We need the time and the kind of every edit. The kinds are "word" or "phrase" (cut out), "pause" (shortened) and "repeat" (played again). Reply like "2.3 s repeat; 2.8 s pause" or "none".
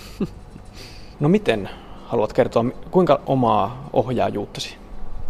3.3 s word